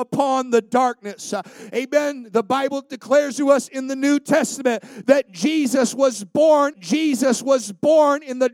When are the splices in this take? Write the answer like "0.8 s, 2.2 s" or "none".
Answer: 6.7 s